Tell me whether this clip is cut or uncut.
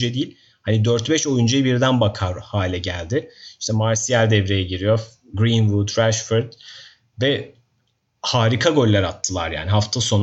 uncut